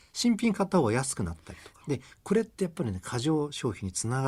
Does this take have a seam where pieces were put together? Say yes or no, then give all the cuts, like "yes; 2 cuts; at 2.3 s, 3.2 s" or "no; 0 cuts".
yes; 1 cut; at 1.8 s